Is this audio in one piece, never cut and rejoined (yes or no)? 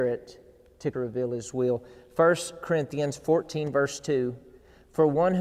no